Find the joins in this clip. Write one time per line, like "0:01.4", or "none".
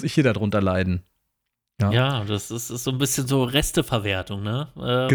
none